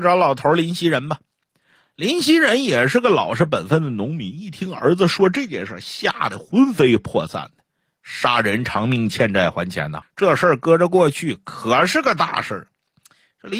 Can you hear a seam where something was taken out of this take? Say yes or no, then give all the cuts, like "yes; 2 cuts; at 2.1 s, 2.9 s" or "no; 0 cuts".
yes; 1 cut; at 10.0 s